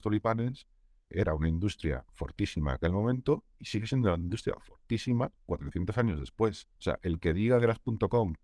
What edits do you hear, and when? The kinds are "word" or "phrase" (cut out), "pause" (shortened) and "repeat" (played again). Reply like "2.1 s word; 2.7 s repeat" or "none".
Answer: 5.4 s pause; 6.8 s pause